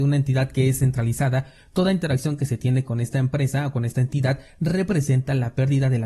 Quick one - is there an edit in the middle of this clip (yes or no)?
no